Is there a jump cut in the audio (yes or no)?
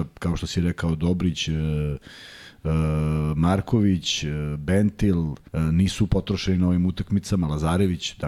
yes